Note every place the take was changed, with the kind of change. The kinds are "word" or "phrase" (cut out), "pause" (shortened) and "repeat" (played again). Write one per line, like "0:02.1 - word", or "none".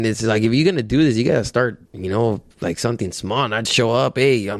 0:01.9 - pause
0:02.5 - pause
0:03.7 - word